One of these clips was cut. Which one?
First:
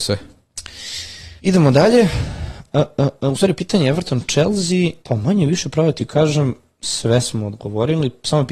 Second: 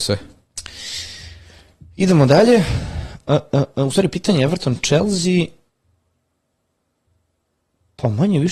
first; 2 cuts; at 1.4 s, 5.0 s

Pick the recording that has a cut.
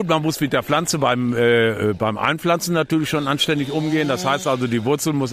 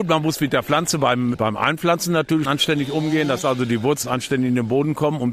second; 4 cuts; at 1.3 s, 2.5 s, 3.4 s, 4.0 s

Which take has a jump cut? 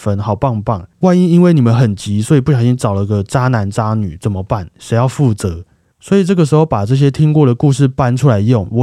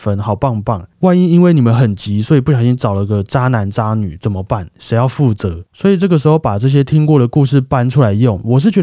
second; 1 cut; at 5.7 s

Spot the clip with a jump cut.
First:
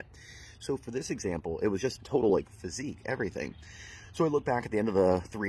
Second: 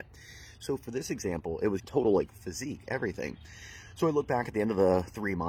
second; 1 cut; at 1.8 s

